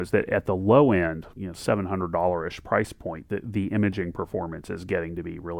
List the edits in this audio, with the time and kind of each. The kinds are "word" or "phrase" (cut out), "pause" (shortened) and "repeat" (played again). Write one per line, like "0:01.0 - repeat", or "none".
0:01.4 - word